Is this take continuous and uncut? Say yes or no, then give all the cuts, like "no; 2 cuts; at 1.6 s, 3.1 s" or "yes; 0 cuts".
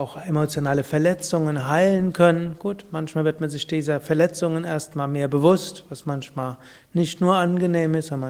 yes; 0 cuts